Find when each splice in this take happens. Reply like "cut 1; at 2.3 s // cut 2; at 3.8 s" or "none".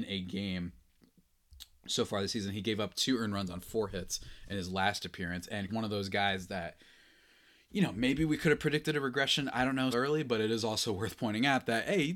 cut 1; at 5.7 s // cut 2; at 9.9 s